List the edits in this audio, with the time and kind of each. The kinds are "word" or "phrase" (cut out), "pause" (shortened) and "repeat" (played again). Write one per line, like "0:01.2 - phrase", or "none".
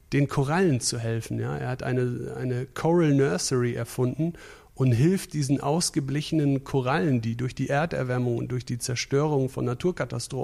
none